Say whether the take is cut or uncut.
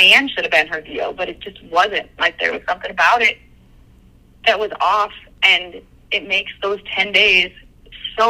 uncut